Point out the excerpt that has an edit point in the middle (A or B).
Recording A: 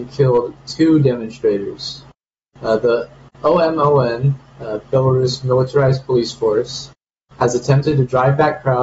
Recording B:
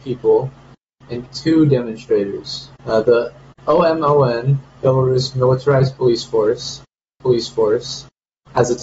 B